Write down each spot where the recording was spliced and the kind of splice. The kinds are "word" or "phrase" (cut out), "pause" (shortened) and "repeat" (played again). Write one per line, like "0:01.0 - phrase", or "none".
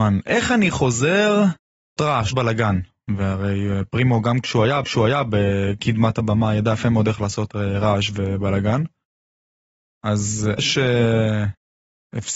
0:02.0 - word
0:02.3 - word
0:04.8 - repeat
0:10.6 - word